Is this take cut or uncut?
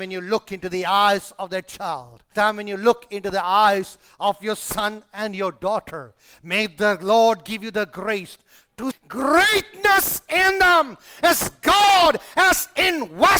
cut